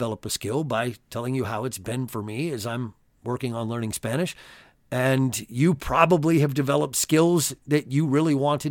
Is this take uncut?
yes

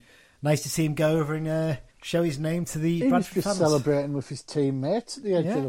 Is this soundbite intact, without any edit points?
no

